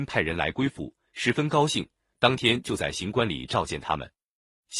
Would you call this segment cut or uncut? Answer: uncut